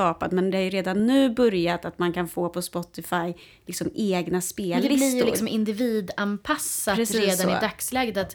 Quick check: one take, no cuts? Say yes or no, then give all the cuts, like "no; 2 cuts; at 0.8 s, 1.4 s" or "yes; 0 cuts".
yes; 0 cuts